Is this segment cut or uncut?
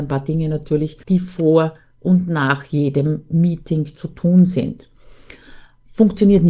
cut